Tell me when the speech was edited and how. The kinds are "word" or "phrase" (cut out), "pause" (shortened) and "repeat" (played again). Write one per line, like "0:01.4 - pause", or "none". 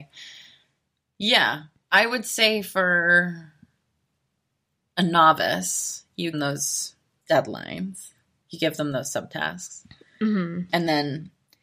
0:06.3 - phrase

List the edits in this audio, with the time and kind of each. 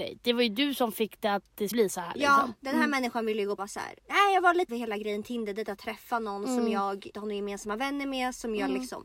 0:01.7 - word
0:03.6 - phrase
0:04.0 - pause
0:04.7 - phrase
0:07.1 - word

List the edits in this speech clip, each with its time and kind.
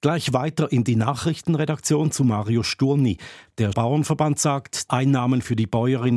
0:03.7 - word
0:04.9 - word

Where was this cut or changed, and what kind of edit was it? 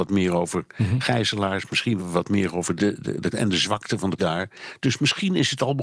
0:02.0 - word
0:02.8 - word
0:03.3 - word
0:04.2 - word

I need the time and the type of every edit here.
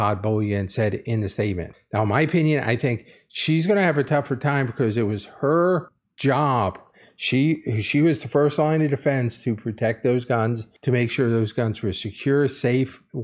none

